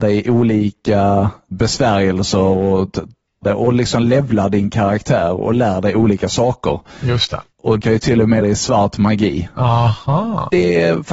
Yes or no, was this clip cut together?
yes